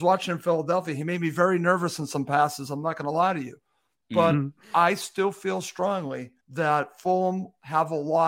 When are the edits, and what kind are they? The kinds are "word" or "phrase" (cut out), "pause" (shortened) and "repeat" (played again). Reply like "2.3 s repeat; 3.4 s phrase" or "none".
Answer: 6.4 s pause